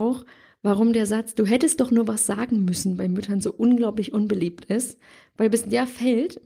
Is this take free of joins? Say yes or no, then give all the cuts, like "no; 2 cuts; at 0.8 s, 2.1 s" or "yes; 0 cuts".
yes; 0 cuts